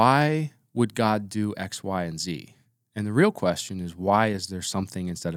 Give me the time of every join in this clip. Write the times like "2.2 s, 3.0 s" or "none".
none